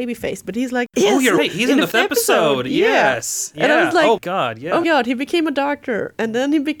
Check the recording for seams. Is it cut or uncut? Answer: cut